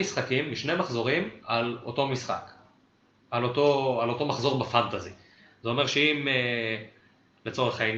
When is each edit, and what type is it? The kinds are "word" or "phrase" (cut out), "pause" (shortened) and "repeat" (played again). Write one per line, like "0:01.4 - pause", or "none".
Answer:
none

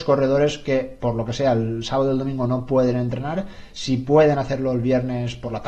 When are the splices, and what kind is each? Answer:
none

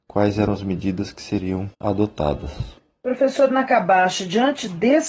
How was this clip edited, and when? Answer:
0:01.7 - pause

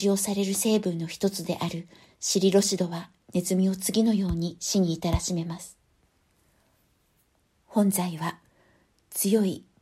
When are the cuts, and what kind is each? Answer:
0:03.2 - pause

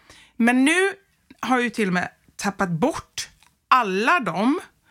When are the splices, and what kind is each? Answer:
none

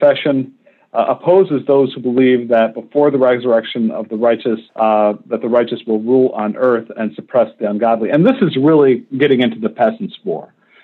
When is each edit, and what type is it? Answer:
0:04.7 - pause

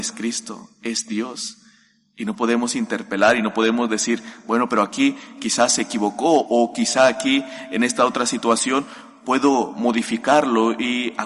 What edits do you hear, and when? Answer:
none

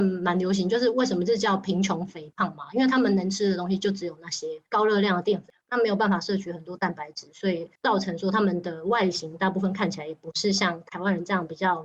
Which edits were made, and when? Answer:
0:04.7 - pause
0:07.8 - pause

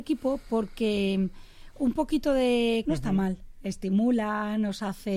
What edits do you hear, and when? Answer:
0:02.9 - phrase

